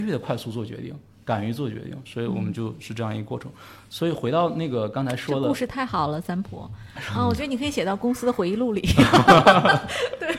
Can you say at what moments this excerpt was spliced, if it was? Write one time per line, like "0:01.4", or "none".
none